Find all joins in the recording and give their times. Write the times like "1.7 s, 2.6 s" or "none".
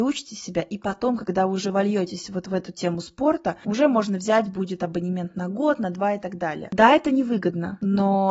none